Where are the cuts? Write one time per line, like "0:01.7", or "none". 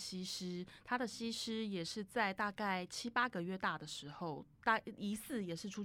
0:04.5